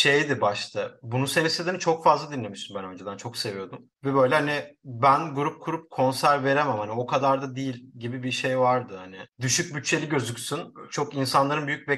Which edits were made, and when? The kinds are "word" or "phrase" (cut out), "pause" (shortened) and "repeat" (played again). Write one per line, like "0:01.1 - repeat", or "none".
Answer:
0:03.9 - pause
0:09.3 - pause